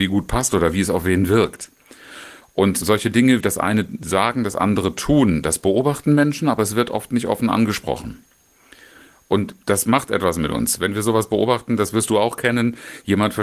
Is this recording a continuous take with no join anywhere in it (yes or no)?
no